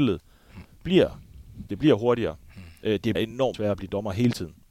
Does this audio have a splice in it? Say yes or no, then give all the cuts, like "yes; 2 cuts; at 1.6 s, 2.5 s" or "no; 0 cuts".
yes; 3 cuts; at 1.7 s, 3.1 s, 3.5 s